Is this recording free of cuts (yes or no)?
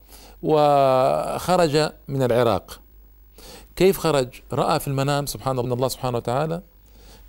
no